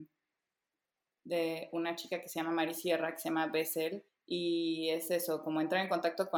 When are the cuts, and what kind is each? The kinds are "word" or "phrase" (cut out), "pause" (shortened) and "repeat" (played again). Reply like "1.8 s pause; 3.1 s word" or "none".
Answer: 4.1 s pause